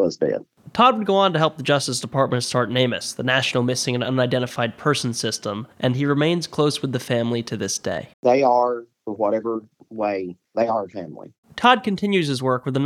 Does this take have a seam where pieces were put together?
yes; 4 cuts; at 5.7 s, 8.1 s, 10.5 s, 11.4 s

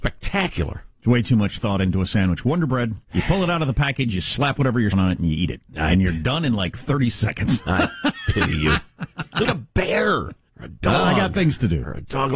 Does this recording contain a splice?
yes; 4 cuts; at 3.0 s, 4.9 s, 9.4 s, 10.5 s

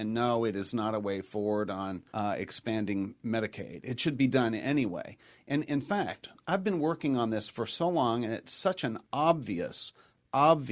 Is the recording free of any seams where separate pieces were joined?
no; 1 cut; at 2.1 s

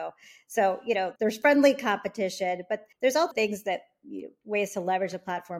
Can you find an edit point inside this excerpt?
yes; 3 cuts; at 1.2 s, 2.9 s, 3.3 s

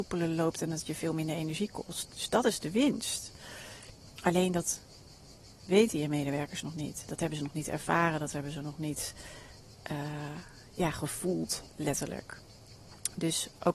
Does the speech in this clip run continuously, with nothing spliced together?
yes; 0 cuts

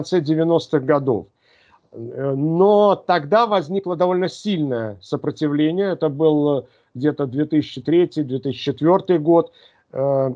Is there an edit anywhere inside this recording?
no; 0 cuts

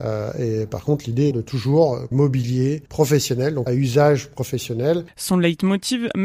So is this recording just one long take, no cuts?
no; 4 cuts; at 1.3 s, 2.1 s, 2.9 s, 3.7 s

